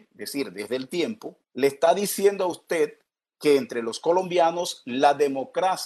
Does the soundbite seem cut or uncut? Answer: cut